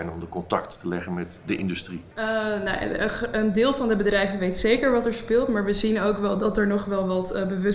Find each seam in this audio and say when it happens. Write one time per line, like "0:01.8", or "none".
0:02.1